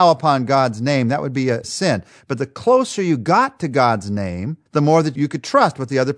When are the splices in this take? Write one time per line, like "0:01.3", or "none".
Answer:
0:04.7